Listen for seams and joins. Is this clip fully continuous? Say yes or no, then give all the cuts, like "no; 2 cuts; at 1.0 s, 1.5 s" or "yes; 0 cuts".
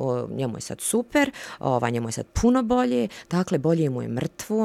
yes; 0 cuts